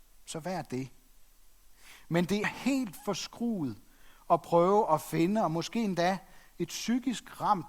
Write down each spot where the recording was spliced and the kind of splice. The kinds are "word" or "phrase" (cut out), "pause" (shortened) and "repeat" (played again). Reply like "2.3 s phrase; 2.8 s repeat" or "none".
2.4 s word